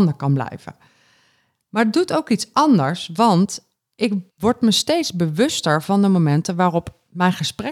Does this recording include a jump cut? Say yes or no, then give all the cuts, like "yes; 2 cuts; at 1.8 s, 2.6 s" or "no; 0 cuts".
yes; 1 cut; at 4.3 s